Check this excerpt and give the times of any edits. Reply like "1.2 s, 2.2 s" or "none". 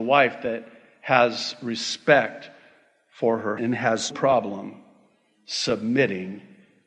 3.6 s, 4.1 s